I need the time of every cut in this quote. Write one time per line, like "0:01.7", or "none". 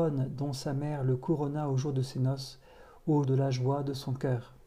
0:03.2